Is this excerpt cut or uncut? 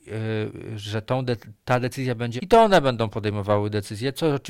cut